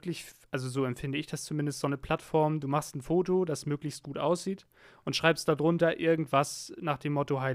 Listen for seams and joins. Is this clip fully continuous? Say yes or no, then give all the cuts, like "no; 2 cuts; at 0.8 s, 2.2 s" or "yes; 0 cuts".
yes; 0 cuts